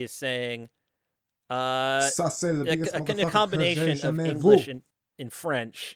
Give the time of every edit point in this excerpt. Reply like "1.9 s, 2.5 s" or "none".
none